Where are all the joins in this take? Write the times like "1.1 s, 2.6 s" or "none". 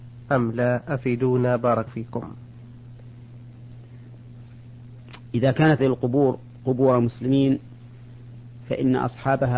1.9 s, 5.8 s